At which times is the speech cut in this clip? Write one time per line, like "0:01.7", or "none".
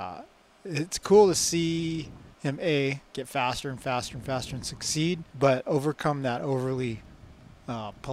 0:02.3
0:03.1
0:05.3

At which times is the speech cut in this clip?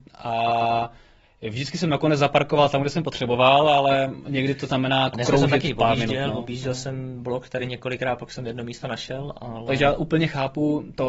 none

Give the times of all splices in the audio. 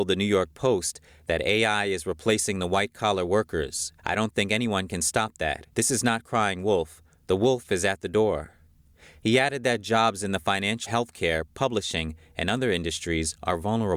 0:04.0
0:05.7
0:10.9

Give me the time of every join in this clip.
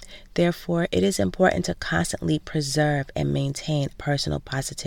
0:03.9

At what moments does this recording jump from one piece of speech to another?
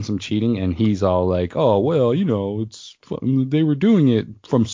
none

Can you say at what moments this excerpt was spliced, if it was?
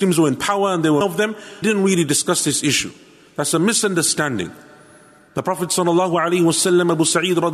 0:01.0
0:01.6

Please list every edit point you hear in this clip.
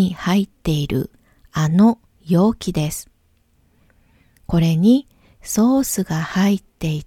none

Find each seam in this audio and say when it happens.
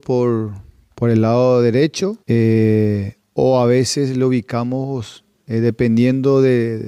0:02.2

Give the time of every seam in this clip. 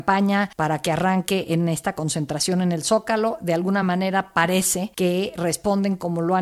none

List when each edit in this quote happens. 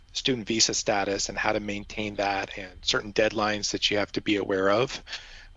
none

